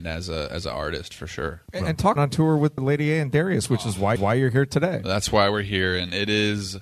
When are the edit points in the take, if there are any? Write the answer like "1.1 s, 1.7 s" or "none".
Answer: 1.7 s, 2.2 s, 2.8 s, 4.2 s